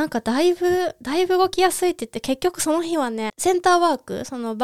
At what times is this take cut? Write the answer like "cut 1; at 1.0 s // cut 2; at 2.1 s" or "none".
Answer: cut 1; at 3.3 s